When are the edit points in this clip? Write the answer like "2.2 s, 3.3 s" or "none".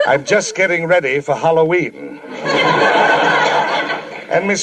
none